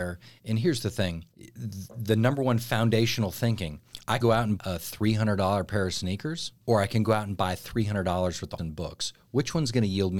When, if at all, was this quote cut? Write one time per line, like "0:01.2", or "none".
0:01.3
0:04.2
0:04.6
0:06.6
0:08.6

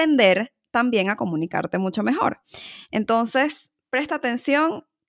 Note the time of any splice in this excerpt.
none

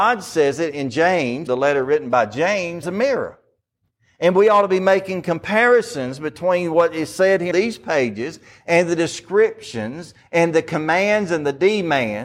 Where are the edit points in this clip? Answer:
0:01.5
0:02.8
0:07.5

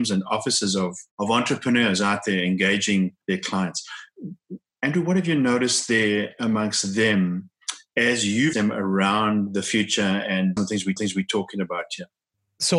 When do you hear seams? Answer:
0:01.1
0:03.2
0:08.5
0:10.6
0:11.0

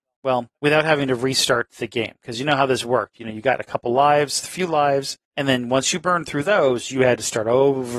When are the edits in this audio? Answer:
0:05.2

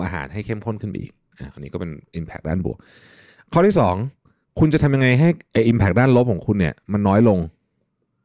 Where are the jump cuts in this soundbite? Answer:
none

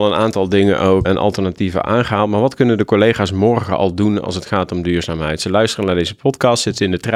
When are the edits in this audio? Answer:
0:01.0

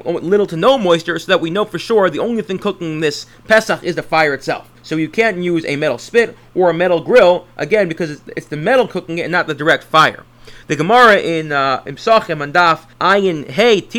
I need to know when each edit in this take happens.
0:04.8
0:12.9

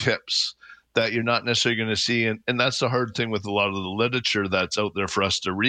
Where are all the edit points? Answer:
none

